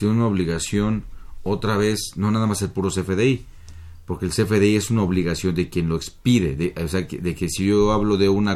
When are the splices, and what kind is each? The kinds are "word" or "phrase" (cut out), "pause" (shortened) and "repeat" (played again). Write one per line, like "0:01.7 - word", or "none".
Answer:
none